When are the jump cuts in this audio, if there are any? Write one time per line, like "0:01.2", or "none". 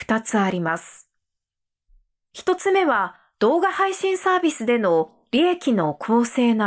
none